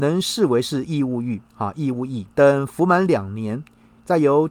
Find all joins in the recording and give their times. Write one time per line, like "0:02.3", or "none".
0:01.5
0:02.3